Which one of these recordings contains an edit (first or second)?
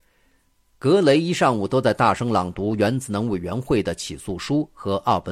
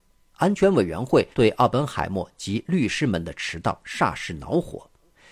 second